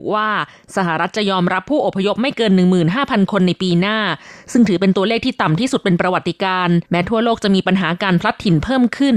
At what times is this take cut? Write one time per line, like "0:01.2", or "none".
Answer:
0:06.8

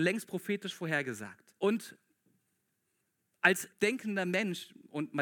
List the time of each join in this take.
0:01.6
0:03.7

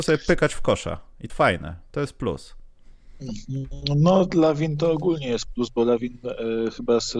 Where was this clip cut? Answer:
0:01.3

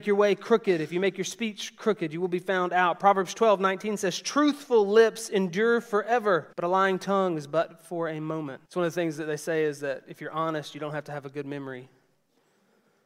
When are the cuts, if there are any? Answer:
0:06.5
0:08.7

